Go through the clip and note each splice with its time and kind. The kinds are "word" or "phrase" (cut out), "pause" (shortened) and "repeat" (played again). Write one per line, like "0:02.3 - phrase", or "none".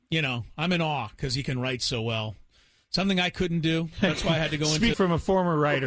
0:04.9 - word